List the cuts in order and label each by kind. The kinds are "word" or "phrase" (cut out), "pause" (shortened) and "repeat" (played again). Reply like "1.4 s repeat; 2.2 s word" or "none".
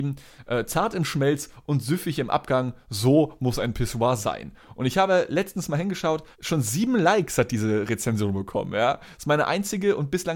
6.3 s pause